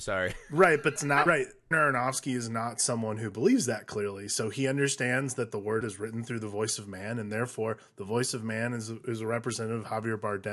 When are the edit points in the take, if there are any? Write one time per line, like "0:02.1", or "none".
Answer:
0:01.0
0:01.3
0:01.7
0:05.8